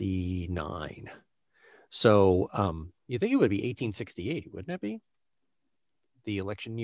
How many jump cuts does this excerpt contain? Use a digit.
1